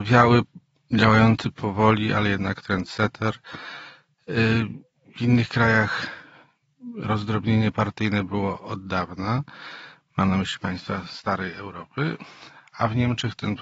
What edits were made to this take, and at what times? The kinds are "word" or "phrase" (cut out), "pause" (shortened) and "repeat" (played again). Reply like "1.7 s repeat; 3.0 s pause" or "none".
none